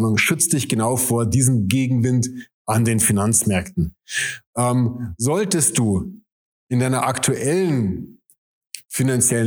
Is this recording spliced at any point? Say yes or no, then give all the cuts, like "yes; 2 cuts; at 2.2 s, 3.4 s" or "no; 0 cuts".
no; 0 cuts